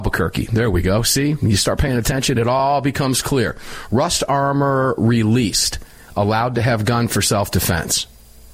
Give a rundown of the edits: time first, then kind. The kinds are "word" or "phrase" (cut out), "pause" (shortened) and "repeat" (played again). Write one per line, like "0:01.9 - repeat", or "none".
none